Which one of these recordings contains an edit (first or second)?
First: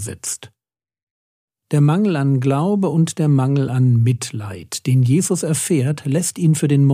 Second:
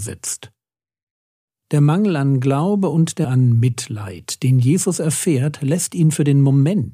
second